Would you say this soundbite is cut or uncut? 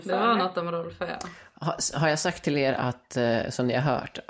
uncut